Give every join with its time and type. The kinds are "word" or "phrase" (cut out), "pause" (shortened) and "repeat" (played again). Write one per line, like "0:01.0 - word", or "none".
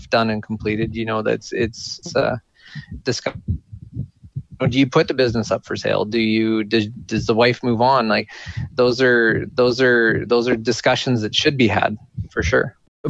0:02.0 - word
0:03.0 - word
0:09.5 - repeat